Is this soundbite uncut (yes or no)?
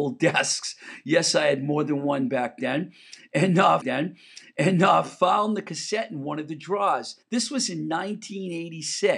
no